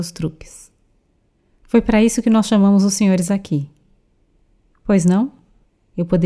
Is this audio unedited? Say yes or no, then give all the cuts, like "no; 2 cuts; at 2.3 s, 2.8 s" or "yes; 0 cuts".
yes; 0 cuts